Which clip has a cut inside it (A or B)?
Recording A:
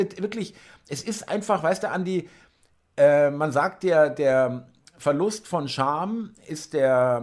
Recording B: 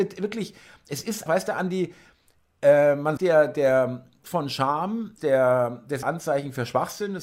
B